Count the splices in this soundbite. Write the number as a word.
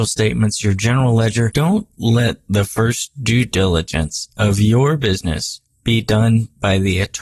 zero